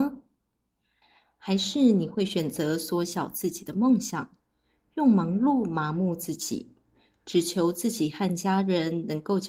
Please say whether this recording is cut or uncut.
uncut